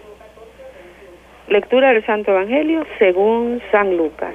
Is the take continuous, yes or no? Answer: yes